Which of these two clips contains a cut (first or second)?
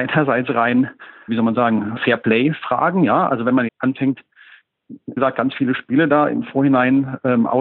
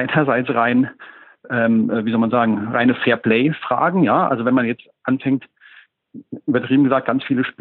first